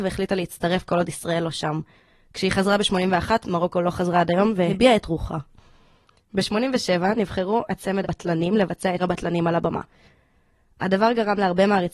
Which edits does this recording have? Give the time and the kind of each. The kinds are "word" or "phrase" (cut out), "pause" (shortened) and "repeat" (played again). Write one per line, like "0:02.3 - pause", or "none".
0:05.0 - word
0:08.0 - word
0:09.0 - word

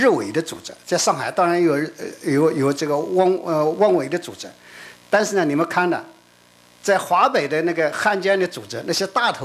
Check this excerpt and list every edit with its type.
none

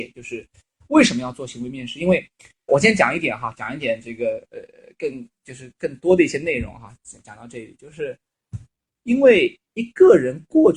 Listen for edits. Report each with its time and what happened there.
0:02.7 - word
0:09.7 - pause

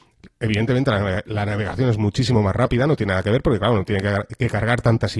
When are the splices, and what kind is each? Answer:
none

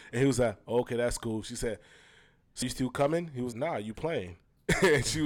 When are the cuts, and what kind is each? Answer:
0:02.6 - word
0:03.5 - word

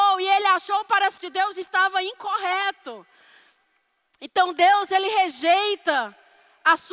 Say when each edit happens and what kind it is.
0:01.2 - word

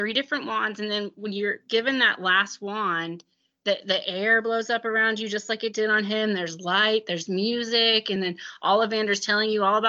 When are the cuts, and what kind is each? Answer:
none

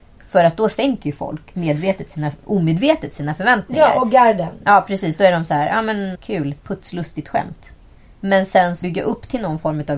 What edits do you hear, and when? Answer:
0:06.1 - word
0:08.8 - word

